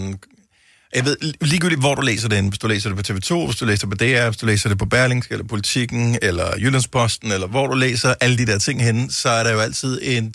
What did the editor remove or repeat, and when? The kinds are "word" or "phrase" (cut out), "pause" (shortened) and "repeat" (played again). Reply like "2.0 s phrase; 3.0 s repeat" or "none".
none